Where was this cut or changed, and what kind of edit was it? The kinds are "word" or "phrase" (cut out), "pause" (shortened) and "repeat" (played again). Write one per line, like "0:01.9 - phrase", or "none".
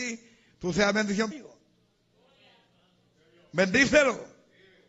0:01.3 - word